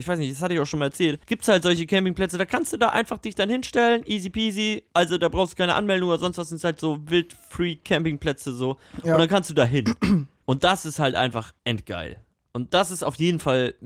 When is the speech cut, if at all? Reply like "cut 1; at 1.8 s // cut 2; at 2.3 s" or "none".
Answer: cut 1; at 1.2 s // cut 2; at 4.9 s // cut 3; at 10.4 s // cut 4; at 11.6 s